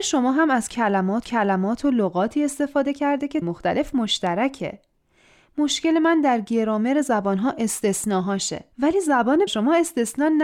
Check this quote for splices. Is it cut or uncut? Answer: cut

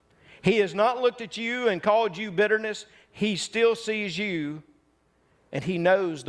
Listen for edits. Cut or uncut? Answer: uncut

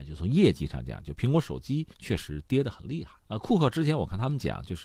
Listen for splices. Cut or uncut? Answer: cut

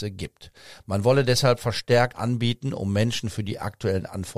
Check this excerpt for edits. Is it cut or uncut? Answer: cut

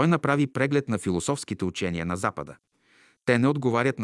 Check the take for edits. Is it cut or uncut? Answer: uncut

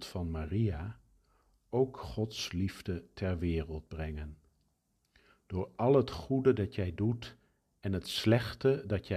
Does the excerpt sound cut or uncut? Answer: uncut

